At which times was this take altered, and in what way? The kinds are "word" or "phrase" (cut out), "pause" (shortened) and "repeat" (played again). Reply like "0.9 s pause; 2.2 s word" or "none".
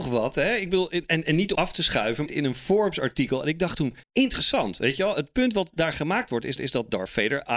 1.5 s word; 2.3 s phrase; 4.0 s pause; 6.6 s repeat